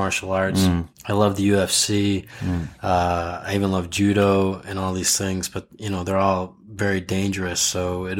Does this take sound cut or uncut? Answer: cut